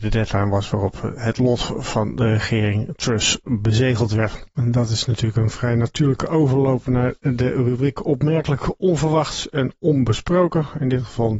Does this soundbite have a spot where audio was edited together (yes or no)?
no